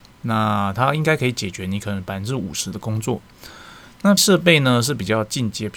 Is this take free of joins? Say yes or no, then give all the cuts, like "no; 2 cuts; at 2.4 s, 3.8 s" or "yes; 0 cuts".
no; 1 cut; at 4.2 s